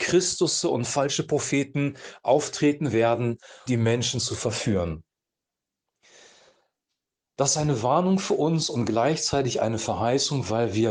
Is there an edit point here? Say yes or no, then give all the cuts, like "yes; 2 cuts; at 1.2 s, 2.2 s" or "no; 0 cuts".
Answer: yes; 1 cut; at 3.7 s